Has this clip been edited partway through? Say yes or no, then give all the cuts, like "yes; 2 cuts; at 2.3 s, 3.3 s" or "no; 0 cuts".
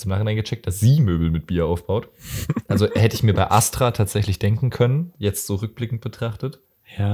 no; 0 cuts